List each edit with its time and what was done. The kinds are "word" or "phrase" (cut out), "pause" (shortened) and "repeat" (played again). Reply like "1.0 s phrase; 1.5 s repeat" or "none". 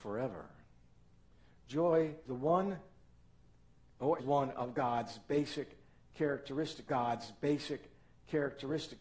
2.3 s word; 4.2 s word; 6.9 s repeat

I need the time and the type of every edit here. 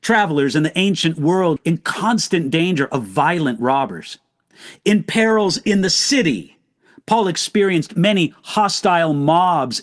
1.6 s word

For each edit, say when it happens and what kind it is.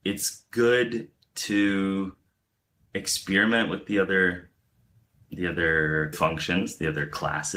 6.1 s word

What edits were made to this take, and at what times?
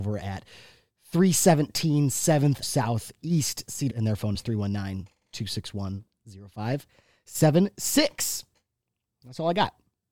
2.6 s word; 3.9 s word; 4.3 s word

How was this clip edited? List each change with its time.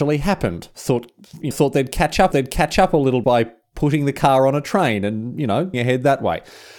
1.5 s word; 2.3 s repeat; 3.2 s word; 5.7 s word

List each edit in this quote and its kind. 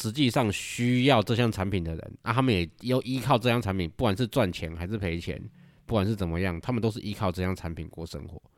none

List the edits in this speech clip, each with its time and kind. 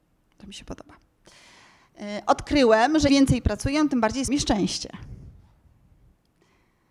3.1 s word; 4.3 s word

